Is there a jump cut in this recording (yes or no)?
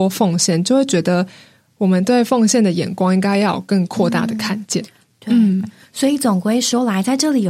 no